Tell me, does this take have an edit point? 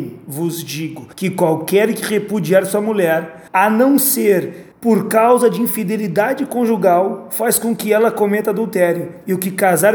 yes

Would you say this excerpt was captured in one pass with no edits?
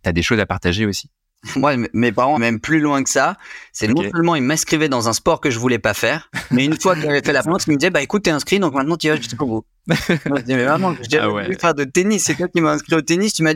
no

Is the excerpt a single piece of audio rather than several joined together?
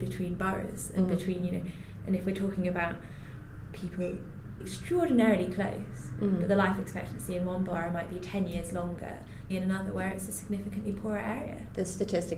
no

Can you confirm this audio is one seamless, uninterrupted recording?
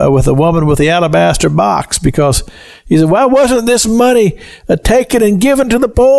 yes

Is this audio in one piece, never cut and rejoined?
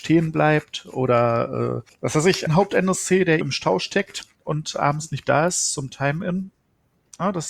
no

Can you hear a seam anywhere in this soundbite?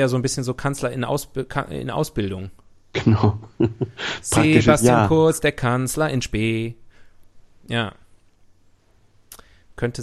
no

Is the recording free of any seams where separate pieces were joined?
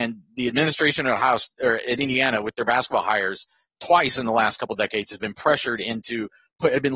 yes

